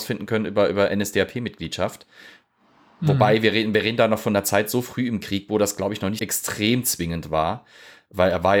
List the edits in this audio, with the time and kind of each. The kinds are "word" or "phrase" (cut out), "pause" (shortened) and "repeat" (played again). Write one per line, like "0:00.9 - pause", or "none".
0:06.2 - word